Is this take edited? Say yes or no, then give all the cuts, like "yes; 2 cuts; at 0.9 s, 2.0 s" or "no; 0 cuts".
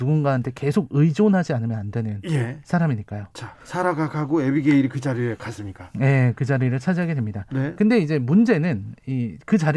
yes; 1 cut; at 3.6 s